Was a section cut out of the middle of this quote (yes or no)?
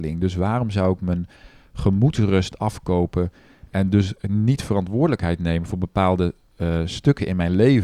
no